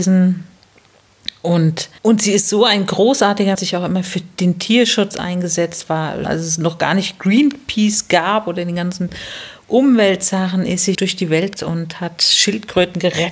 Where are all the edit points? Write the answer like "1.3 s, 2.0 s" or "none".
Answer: 2.0 s, 3.5 s, 6.2 s, 10.9 s, 11.6 s